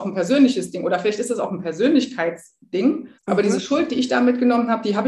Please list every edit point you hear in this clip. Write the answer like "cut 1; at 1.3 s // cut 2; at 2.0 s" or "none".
cut 1; at 3.2 s